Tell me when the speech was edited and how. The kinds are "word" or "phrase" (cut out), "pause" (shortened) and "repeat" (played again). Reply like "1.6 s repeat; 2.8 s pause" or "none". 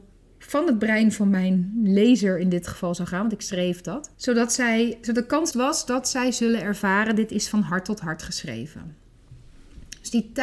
4.1 s pause; 5.5 s phrase